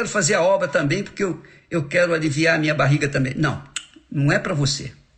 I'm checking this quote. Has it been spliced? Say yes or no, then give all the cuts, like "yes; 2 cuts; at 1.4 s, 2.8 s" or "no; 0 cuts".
no; 0 cuts